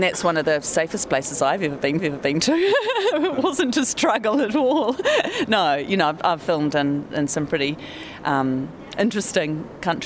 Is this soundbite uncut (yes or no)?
no